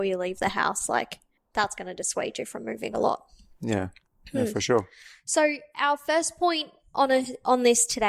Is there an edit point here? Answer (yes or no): yes